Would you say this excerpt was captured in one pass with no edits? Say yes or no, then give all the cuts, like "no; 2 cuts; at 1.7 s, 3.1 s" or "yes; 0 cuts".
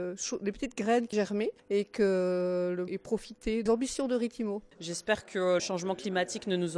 no; 6 cuts; at 1.1 s, 1.6 s, 2.9 s, 3.7 s, 4.7 s, 5.6 s